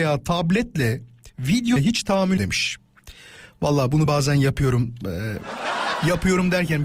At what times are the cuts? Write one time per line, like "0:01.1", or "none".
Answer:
0:01.8
0:02.4
0:04.1